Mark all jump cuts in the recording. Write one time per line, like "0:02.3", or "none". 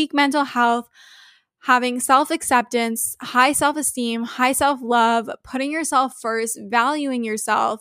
none